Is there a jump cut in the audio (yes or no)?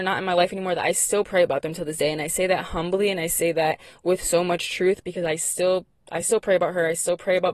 no